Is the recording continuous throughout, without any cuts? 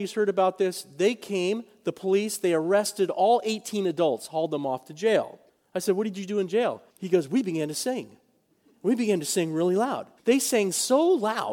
no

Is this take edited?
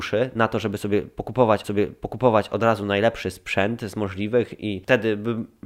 yes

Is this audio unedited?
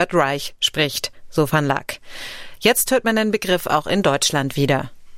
yes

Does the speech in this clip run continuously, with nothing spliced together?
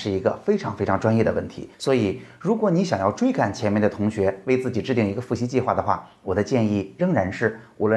no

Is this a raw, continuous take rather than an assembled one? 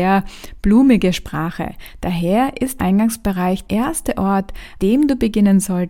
no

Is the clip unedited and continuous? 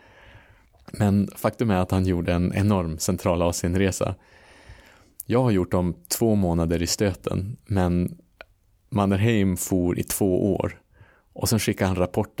yes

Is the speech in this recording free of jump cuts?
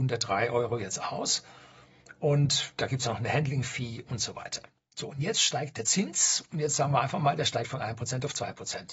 yes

